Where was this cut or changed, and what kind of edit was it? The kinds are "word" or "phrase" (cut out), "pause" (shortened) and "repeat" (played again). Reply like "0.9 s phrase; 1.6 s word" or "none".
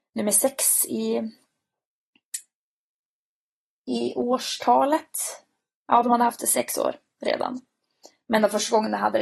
none